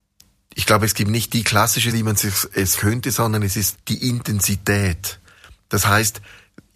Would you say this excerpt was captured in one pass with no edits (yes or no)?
no